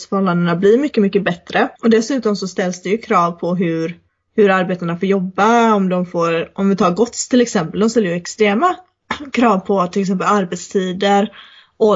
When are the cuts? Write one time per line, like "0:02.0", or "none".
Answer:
0:01.8
0:04.1